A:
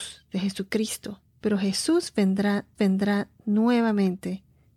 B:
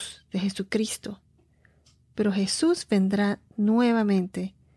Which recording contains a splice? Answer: A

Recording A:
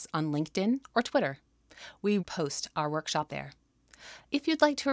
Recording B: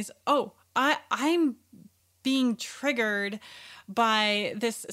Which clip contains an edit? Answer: A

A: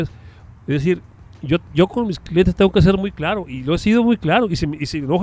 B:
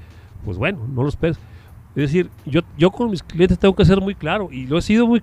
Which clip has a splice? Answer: B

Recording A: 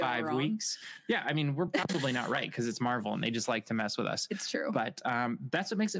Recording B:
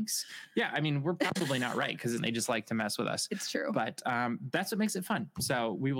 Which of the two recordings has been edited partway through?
B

